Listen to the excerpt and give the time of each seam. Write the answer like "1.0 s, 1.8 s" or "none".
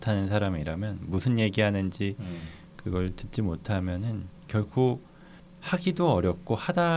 4.4 s